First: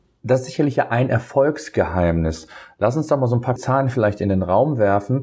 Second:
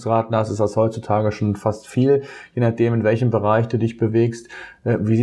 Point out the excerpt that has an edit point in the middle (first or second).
first